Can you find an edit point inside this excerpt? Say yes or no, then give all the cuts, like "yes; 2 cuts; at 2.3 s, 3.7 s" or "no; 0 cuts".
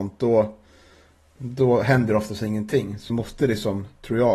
yes; 1 cut; at 3.1 s